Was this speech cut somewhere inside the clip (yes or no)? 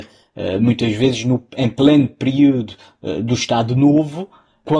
no